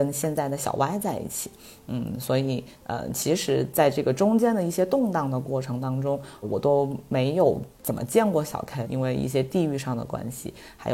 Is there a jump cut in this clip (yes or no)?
yes